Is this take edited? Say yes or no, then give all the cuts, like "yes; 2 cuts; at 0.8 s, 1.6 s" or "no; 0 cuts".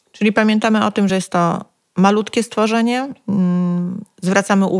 no; 0 cuts